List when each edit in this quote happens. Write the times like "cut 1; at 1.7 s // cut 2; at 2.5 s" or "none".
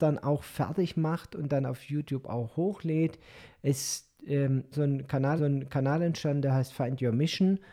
cut 1; at 4.7 s // cut 2; at 5.4 s